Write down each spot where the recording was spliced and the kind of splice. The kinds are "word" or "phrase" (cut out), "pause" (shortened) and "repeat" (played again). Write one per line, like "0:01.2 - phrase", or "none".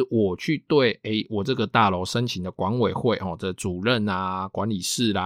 none